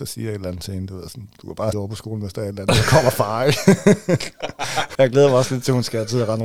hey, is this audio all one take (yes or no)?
no